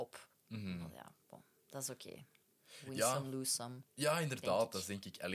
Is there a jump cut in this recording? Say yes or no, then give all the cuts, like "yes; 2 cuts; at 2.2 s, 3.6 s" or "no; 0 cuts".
no; 0 cuts